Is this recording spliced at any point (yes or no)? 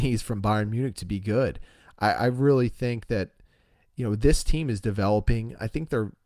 no